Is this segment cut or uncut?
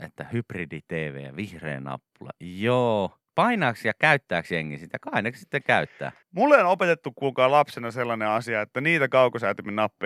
cut